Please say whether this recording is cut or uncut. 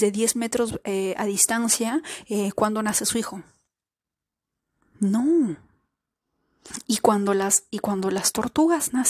uncut